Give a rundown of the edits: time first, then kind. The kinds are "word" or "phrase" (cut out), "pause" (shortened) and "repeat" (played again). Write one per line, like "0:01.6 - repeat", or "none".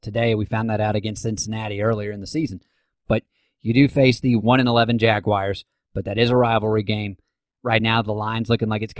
none